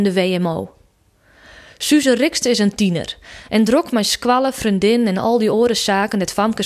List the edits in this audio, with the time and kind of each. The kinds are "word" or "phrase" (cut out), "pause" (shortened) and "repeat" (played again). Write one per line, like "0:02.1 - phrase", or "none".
none